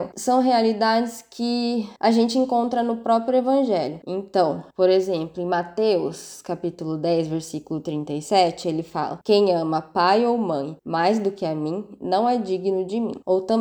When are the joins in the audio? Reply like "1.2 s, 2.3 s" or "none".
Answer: 4.7 s, 10.8 s